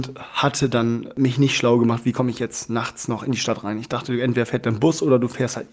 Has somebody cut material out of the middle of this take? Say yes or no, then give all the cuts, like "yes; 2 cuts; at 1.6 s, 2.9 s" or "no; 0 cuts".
no; 0 cuts